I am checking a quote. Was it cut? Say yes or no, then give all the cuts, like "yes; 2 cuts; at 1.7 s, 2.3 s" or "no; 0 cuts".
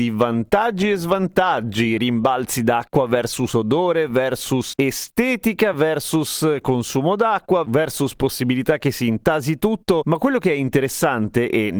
no; 0 cuts